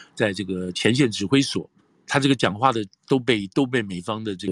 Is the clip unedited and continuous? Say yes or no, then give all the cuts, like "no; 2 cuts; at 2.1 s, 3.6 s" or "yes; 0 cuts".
no; 1 cut; at 1.8 s